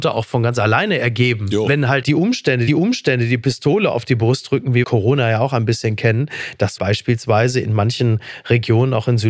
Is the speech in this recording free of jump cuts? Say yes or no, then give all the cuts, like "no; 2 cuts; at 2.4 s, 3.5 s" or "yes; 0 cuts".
no; 4 cuts; at 2.0 s, 2.7 s, 4.8 s, 6.8 s